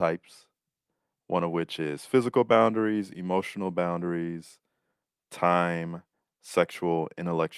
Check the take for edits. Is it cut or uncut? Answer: uncut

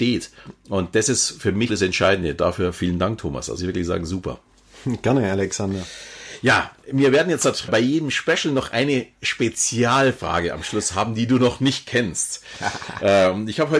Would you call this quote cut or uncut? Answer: cut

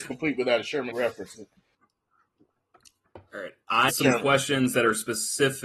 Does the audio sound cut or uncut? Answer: cut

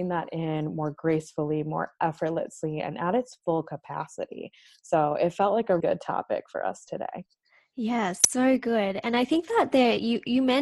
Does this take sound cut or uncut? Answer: cut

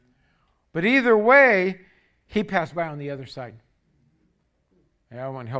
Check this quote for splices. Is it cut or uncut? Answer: uncut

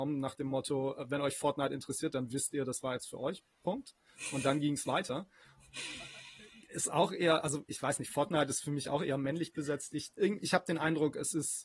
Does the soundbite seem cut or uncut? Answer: uncut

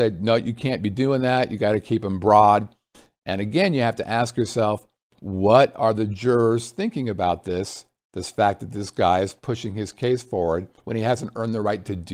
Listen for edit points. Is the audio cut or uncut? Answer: cut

